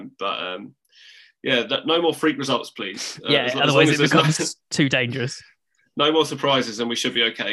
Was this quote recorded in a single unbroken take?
yes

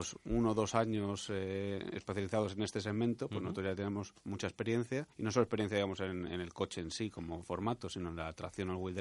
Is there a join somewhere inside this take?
yes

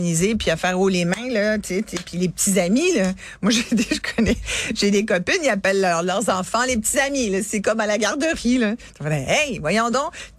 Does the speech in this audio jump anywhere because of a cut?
no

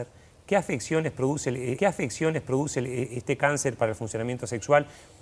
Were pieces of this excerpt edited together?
yes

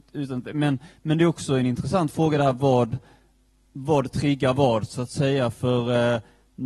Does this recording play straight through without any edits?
yes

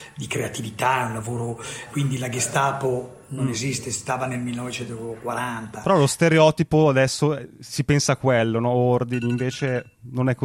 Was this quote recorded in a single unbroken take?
no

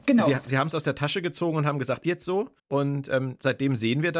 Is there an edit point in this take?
yes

